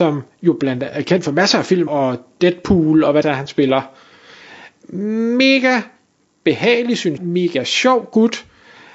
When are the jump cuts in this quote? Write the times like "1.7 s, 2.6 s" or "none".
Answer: 1.9 s, 3.2 s, 7.2 s